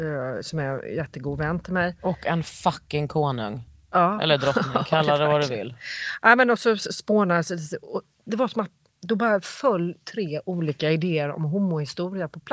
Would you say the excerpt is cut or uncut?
uncut